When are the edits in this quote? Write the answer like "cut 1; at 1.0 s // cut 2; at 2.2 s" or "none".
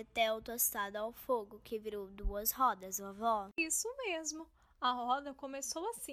none